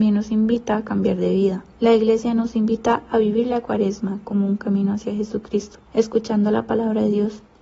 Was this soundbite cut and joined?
yes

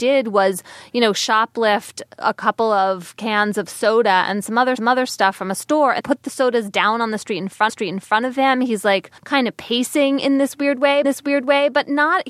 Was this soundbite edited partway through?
yes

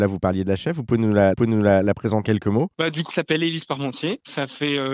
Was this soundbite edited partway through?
yes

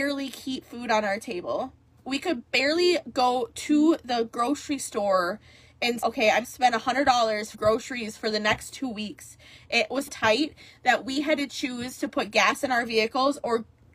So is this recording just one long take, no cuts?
no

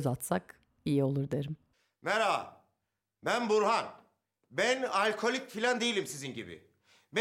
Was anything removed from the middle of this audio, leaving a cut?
no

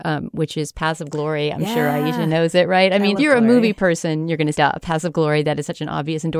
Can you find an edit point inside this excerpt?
yes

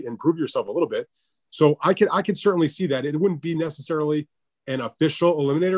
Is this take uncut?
yes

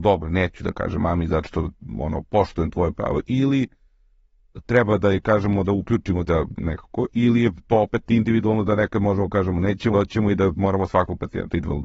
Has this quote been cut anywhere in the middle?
yes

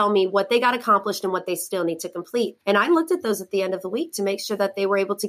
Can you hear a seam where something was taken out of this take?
yes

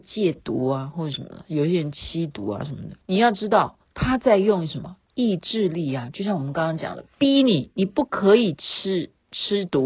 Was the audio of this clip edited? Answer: yes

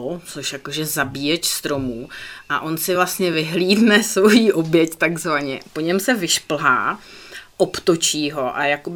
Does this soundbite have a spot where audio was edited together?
no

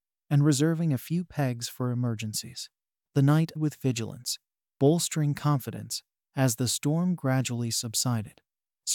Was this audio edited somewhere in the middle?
yes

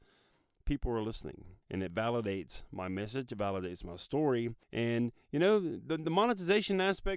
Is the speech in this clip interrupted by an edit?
yes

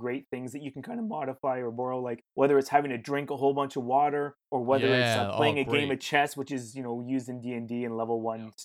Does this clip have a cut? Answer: yes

